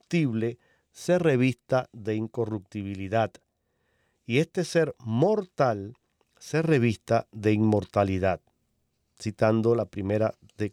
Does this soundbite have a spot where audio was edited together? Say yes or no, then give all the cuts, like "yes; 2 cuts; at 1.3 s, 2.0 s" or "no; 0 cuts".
no; 0 cuts